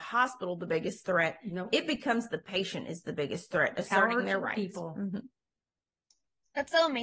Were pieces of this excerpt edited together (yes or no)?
no